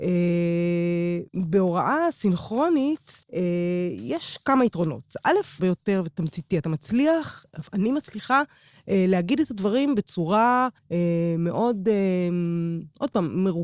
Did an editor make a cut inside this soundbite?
yes; 4 cuts; at 1.3 s, 3.2 s, 5.6 s, 10.8 s

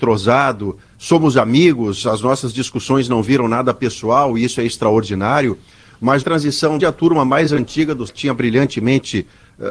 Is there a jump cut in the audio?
yes; 3 cuts; at 6.2 s, 6.8 s, 8.1 s

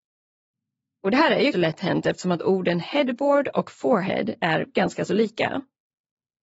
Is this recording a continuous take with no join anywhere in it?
no; 1 cut; at 1.5 s

